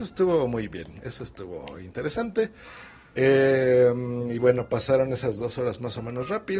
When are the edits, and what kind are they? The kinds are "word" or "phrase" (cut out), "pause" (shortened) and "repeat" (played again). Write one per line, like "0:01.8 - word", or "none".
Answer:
none